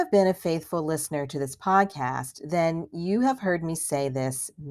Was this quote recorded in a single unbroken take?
yes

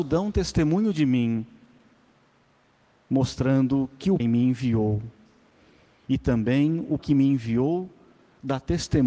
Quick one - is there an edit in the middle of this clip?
yes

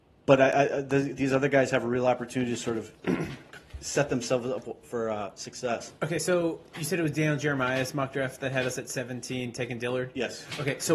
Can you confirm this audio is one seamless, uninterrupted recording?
no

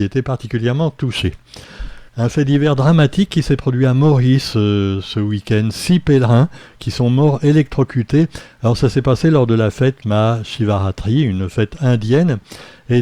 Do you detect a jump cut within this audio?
yes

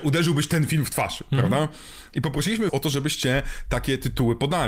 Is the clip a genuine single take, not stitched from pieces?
no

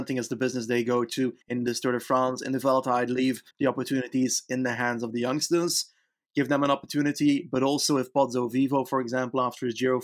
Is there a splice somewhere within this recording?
yes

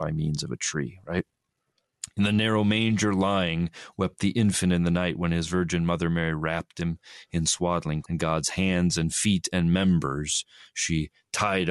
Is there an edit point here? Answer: yes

